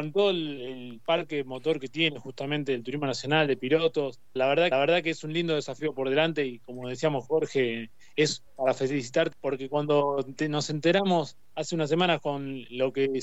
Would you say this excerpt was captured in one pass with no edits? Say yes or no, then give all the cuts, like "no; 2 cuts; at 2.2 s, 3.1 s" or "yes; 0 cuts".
no; 5 cuts; at 4.4 s, 4.7 s, 7.2 s, 8.5 s, 9.3 s